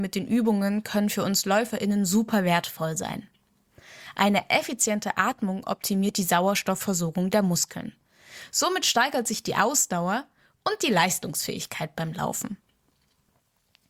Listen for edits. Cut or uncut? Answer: uncut